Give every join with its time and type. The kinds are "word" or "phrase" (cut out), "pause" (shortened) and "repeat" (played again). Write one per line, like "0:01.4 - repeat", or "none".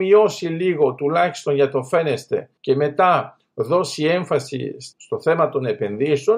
0:02.6 - pause
0:04.9 - pause